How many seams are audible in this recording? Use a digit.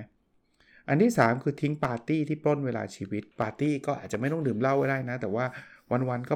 1